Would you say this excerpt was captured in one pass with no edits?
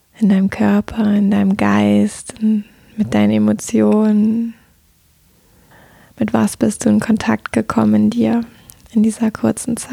yes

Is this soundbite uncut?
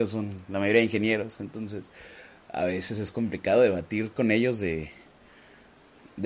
yes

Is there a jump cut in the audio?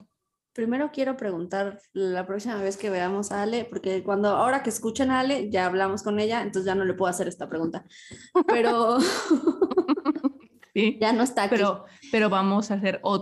no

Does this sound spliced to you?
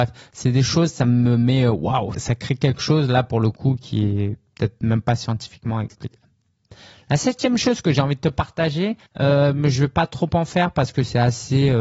yes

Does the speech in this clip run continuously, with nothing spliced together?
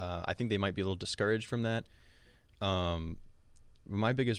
yes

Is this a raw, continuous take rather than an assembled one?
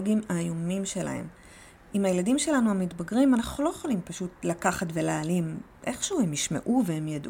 yes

